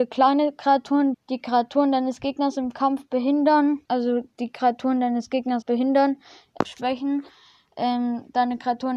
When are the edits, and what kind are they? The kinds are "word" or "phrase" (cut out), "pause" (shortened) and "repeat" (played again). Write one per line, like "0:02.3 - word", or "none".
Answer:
0:01.1 - word
0:03.8 - pause
0:05.6 - word
0:06.6 - word